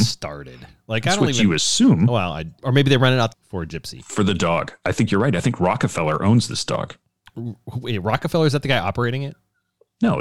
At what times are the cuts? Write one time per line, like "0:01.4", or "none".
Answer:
0:03.3